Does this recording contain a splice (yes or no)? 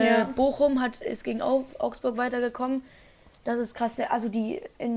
no